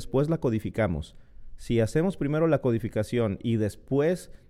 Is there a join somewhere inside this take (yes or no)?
no